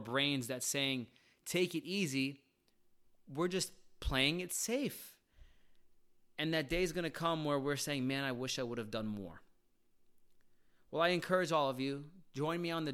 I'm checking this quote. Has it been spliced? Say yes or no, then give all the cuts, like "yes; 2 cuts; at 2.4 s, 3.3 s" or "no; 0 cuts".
no; 0 cuts